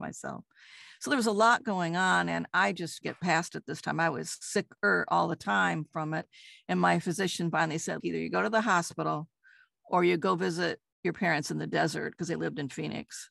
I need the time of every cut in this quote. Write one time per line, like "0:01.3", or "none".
0:03.0
0:08.0